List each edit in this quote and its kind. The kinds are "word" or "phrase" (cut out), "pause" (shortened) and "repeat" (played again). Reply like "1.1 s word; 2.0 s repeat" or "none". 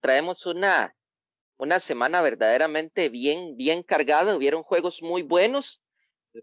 none